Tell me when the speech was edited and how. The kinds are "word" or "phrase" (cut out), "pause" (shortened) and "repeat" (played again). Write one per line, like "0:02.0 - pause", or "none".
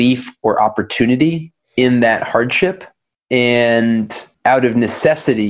none